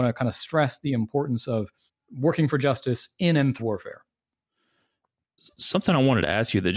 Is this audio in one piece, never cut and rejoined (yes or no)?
no